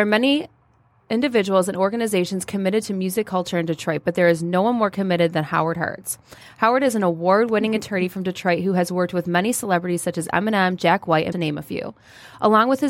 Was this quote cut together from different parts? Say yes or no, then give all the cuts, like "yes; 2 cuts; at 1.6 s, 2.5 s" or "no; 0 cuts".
yes; 1 cut; at 11.3 s